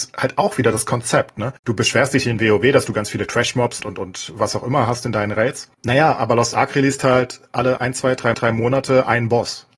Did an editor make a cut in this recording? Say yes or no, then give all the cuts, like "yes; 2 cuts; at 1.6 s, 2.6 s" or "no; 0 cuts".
yes; 5 cuts; at 1.6 s, 3.8 s, 5.7 s, 7.8 s, 8.3 s